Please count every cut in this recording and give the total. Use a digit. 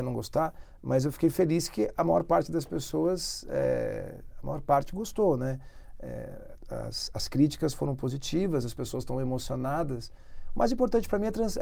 0